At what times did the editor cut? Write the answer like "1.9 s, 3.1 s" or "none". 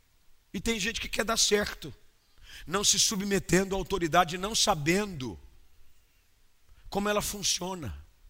none